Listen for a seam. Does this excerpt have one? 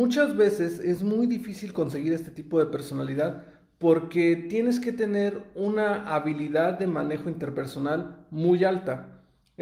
no; 0 cuts

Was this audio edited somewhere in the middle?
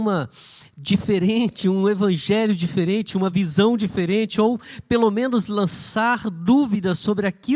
no; 0 cuts

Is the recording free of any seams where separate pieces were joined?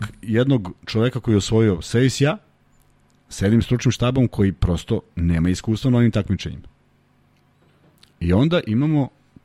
yes; 0 cuts

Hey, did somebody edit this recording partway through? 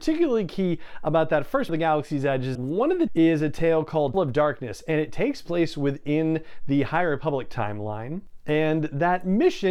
yes; 4 cuts; at 1.7 s, 2.5 s, 3.1 s, 4.1 s

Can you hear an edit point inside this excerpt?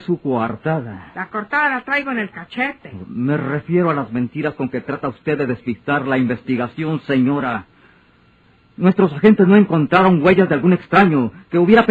no; 0 cuts

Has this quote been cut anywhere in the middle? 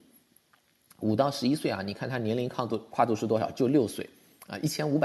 no; 0 cuts

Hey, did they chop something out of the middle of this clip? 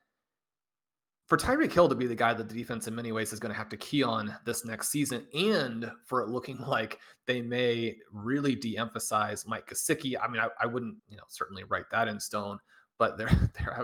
yes; 1 cut; at 11.0 s

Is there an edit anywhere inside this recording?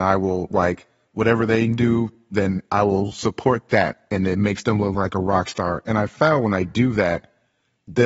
no; 0 cuts

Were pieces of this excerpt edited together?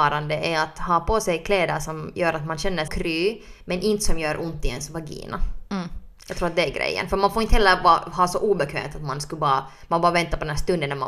yes; 1 cut; at 2.9 s

